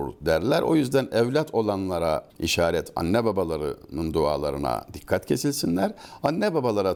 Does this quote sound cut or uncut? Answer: cut